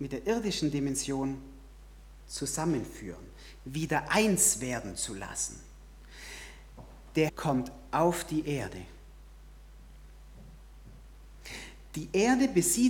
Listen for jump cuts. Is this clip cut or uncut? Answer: cut